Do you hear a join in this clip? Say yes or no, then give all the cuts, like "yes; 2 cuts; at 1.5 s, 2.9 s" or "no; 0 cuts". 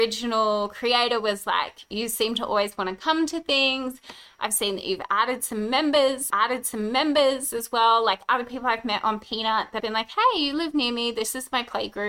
yes; 2 cuts; at 6.3 s, 9.8 s